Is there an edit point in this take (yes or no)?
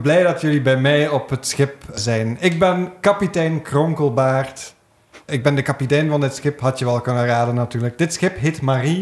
no